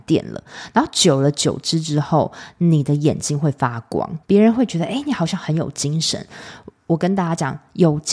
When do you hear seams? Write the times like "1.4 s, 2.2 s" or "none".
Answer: 4.2 s